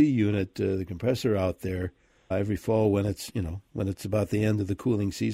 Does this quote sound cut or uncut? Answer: cut